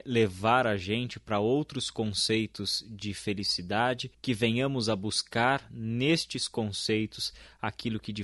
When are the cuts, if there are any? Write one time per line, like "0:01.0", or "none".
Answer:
0:04.1